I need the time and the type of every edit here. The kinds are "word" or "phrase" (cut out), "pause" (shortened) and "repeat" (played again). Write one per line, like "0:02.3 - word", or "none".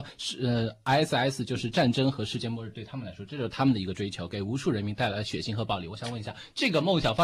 none